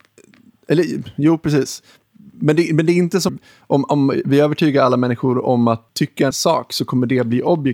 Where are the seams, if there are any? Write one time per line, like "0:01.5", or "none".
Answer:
0:03.3
0:05.9
0:06.3